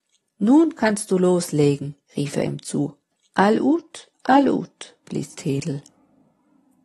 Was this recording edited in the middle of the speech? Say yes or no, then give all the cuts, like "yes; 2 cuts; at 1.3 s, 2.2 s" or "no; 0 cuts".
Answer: yes; 3 cuts; at 2.1 s, 3.2 s, 4.1 s